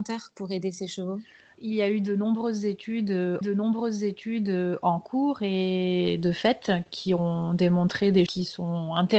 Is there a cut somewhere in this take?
yes; 3 cuts; at 1.5 s, 3.4 s, 8.3 s

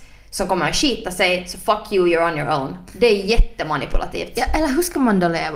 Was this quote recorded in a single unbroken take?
yes; 0 cuts

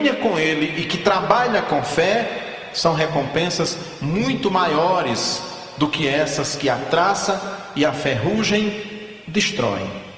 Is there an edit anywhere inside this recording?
no; 0 cuts

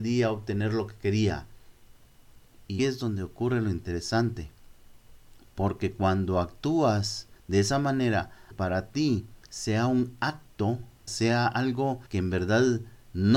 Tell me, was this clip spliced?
yes; 6 cuts; at 2.8 s, 7.4 s, 8.5 s, 9.4 s, 11.1 s, 12.1 s

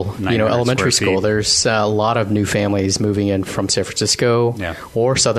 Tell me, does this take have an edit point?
no; 0 cuts

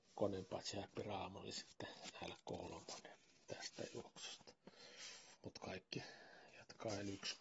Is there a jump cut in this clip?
yes; 1 cut; at 5.3 s

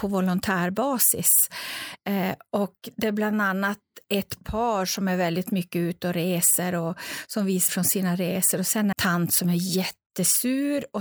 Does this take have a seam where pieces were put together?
yes; 2 cuts; at 7.7 s, 8.9 s

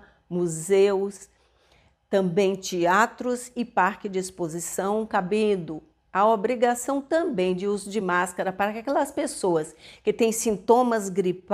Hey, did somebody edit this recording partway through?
no; 0 cuts

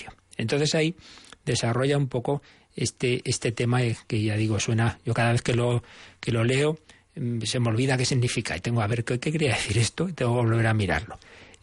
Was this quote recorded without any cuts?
yes; 0 cuts

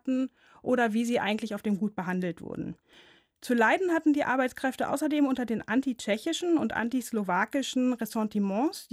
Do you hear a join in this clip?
no; 0 cuts

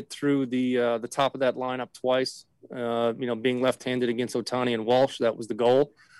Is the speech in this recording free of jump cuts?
yes; 0 cuts

